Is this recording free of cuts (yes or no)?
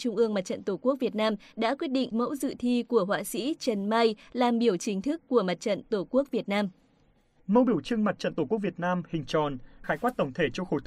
no